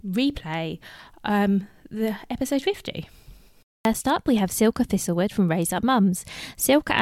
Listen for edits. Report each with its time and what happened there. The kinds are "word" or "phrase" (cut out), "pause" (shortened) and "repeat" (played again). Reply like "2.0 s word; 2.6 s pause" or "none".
3.6 s pause